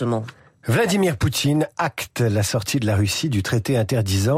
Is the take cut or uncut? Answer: uncut